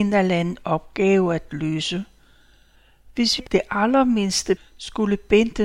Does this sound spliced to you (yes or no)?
yes